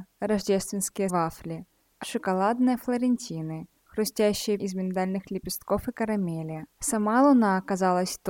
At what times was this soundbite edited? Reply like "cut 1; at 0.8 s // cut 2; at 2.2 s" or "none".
cut 1; at 1.1 s // cut 2; at 2.0 s // cut 3; at 4.6 s // cut 4; at 6.7 s